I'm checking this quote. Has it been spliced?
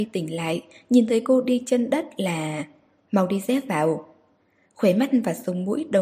no; 0 cuts

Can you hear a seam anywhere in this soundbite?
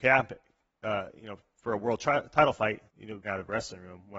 yes; 2 cuts; at 2.9 s, 3.2 s

